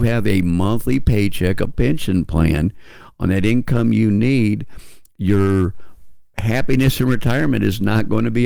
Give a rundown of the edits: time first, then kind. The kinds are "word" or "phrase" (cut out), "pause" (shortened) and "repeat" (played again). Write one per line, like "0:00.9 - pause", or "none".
0:01.7 - word